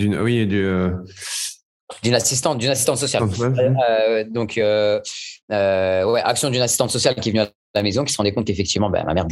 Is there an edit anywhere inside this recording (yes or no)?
yes